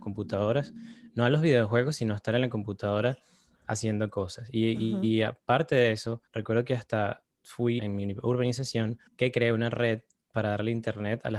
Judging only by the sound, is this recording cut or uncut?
cut